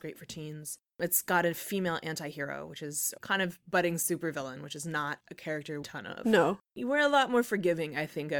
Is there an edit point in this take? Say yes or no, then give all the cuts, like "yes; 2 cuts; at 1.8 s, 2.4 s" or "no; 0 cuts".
yes; 2 cuts; at 3.2 s, 5.8 s